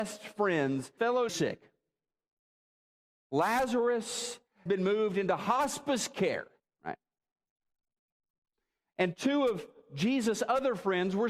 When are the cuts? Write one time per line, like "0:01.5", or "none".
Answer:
0:01.0
0:01.3
0:04.7
0:06.6